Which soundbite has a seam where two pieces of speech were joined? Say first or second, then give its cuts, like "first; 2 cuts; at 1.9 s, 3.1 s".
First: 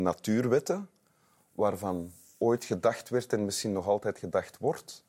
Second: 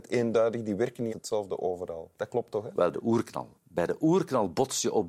second; 4 cuts; at 1.1 s, 2.1 s, 2.9 s, 3.6 s